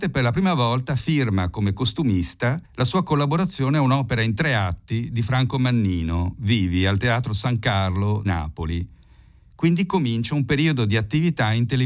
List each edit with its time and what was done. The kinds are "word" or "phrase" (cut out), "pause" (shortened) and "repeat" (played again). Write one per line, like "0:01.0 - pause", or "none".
0:02.6 - pause
0:08.2 - word

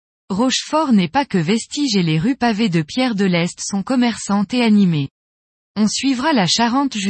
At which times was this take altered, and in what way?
none

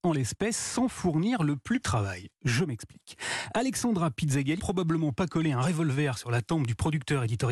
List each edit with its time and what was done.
0:01.8 - word
0:04.6 - word

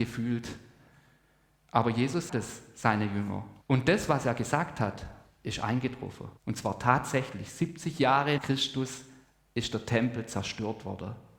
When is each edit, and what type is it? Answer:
0:02.3 - word
0:03.6 - pause
0:06.4 - pause
0:08.4 - word

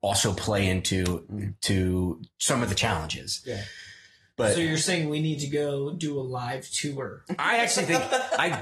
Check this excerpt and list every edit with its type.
none

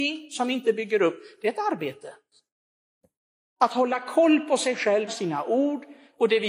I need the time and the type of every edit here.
0:05.1 - phrase

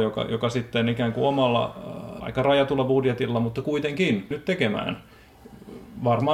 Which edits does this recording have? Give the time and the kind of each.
0:02.2 - word
0:04.3 - word

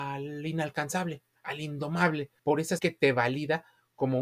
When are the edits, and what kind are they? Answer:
0:02.4 - pause
0:02.8 - word

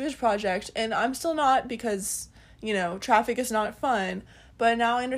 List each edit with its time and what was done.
none

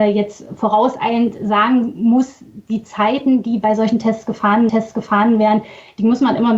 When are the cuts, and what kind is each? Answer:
0:04.7 - repeat

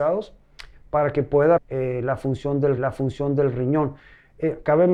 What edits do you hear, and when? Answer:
0:01.6 - word
0:02.8 - repeat

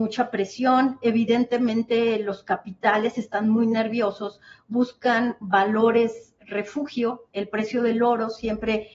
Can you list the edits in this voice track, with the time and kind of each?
none

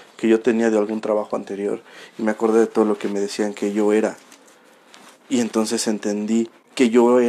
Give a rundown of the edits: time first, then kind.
none

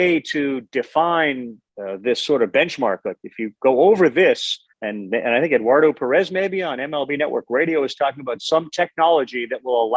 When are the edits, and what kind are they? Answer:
0:01.7 - pause
0:04.7 - pause

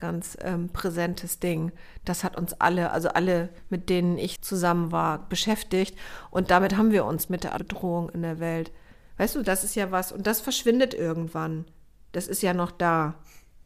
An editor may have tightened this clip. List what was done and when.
0:04.4 - word
0:07.3 - word
0:07.6 - word

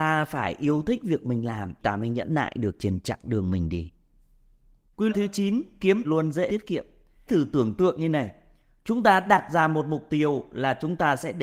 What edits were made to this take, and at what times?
0:01.8 - word
0:05.1 - word
0:06.0 - word
0:06.5 - word
0:07.3 - word

